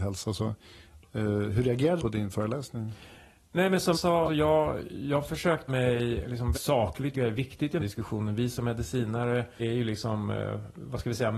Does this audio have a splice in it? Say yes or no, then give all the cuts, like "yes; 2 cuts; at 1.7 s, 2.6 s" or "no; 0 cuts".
yes; 8 cuts; at 2.0 s, 3.9 s, 4.3 s, 5.7 s, 6.5 s, 7.1 s, 7.8 s, 9.6 s